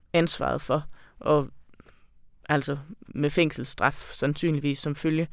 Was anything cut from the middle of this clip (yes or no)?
yes